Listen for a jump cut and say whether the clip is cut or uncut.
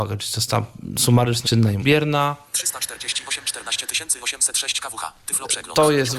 cut